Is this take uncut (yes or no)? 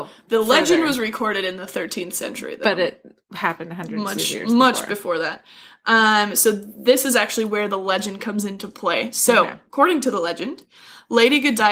yes